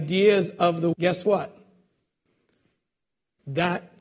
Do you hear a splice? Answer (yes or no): yes